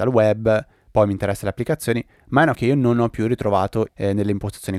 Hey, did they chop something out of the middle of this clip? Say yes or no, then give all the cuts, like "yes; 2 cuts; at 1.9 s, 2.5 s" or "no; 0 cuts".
yes; 2 cuts; at 2.5 s, 3.9 s